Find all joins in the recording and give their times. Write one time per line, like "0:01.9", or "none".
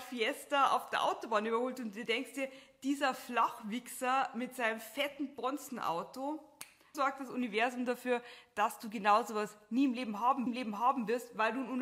0:06.9
0:10.5